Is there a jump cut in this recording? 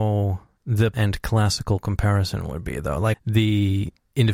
yes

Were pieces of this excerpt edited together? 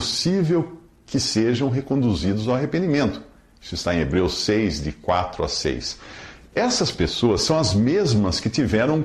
no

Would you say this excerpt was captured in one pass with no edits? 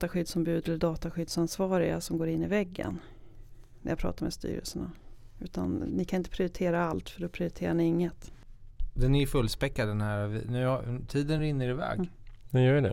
yes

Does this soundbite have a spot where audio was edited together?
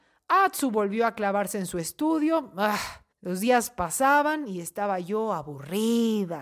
yes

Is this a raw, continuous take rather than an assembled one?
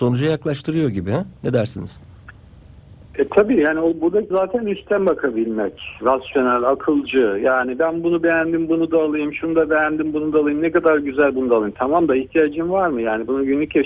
no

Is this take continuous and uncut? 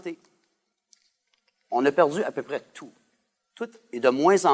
yes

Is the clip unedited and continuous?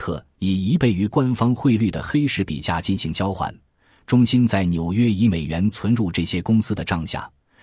yes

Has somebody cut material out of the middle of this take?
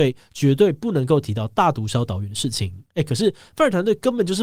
yes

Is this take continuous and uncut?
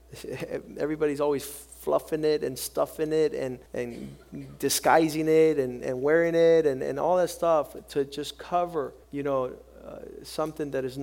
no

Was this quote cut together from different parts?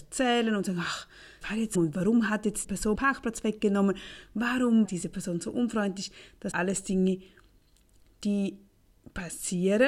yes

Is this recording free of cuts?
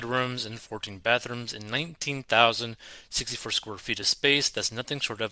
yes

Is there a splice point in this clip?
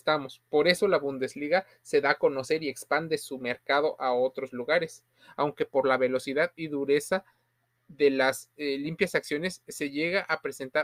no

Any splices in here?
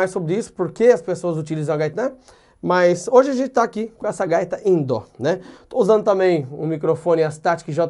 yes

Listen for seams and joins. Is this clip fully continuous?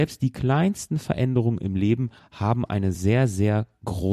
yes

